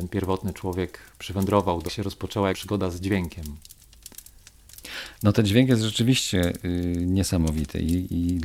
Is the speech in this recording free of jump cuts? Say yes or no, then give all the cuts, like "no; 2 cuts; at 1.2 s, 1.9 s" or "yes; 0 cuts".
no; 2 cuts; at 1.9 s, 2.5 s